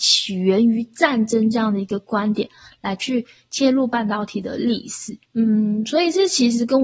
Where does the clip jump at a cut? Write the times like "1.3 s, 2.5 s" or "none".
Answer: none